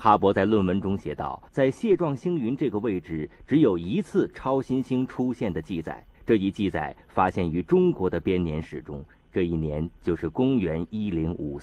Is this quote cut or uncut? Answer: cut